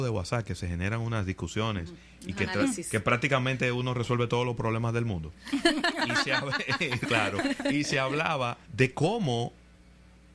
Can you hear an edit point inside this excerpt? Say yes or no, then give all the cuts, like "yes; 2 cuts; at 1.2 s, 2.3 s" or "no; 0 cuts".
yes; 1 cut; at 8.6 s